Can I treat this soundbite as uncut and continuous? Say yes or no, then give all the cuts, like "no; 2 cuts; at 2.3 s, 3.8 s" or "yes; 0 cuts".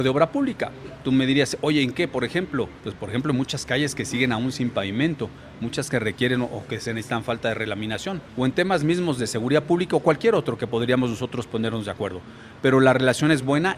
no; 2 cuts; at 2.8 s, 8.3 s